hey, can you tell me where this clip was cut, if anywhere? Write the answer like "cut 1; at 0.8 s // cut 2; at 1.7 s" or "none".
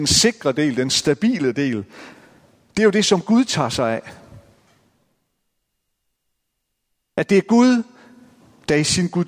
none